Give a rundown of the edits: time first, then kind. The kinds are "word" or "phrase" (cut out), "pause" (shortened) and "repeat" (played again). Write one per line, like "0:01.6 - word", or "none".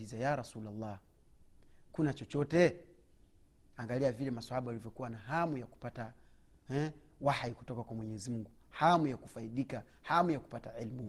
none